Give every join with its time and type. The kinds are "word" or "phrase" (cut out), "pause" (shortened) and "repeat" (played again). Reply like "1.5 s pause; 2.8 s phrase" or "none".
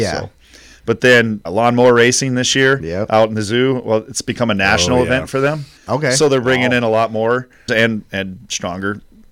1.5 s word; 7.7 s phrase